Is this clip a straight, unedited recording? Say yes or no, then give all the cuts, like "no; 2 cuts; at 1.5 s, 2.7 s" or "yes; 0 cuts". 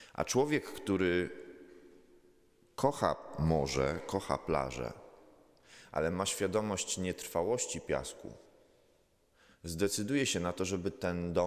yes; 0 cuts